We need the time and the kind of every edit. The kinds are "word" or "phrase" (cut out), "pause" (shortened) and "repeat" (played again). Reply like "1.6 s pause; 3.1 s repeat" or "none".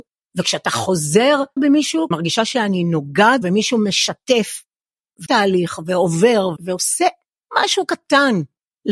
1.6 s word; 2.1 s word; 3.4 s word; 5.3 s word; 6.6 s word